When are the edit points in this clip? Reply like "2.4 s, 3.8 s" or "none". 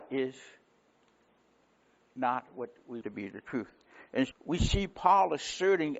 3.0 s, 4.3 s

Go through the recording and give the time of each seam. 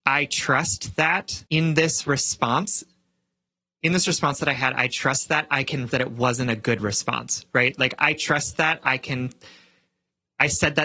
1.5 s, 5.9 s

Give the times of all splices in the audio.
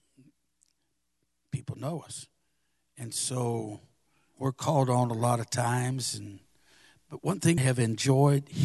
4.3 s, 7.6 s

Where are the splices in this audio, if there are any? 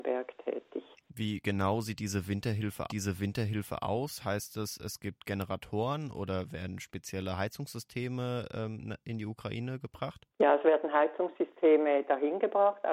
0.9 s, 2.9 s, 10.3 s

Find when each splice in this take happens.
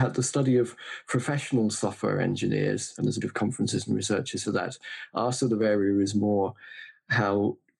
3.2 s, 4.4 s

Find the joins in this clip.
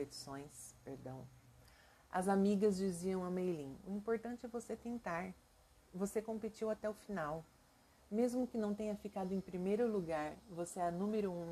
none

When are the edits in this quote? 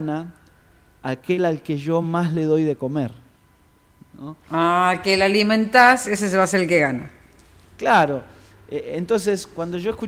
none

